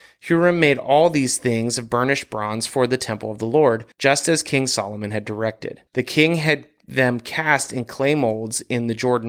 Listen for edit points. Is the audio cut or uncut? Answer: cut